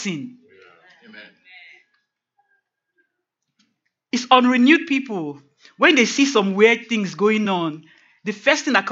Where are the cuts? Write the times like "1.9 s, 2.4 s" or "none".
none